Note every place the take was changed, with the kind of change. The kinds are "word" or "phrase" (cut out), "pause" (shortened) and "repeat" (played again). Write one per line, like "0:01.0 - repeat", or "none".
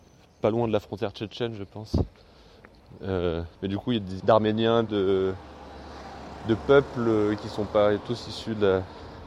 0:03.5 - pause
0:04.2 - phrase
0:04.9 - word